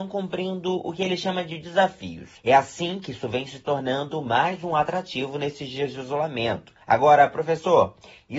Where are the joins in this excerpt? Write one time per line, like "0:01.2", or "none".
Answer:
0:02.4
0:06.8